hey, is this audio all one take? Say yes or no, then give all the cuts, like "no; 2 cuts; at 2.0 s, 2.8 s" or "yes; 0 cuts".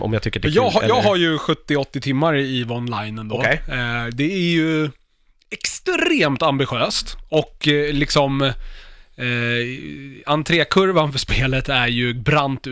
yes; 0 cuts